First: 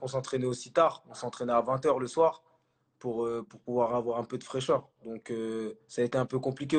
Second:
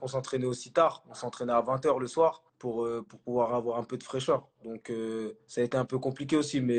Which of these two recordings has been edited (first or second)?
second